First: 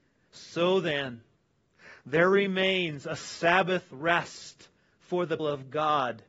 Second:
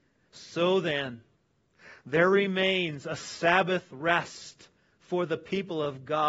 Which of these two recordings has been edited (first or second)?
first